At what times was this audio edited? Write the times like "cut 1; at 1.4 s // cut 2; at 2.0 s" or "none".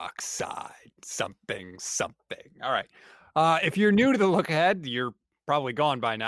none